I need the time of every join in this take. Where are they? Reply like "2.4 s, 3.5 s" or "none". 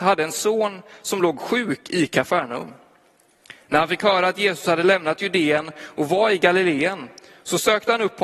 none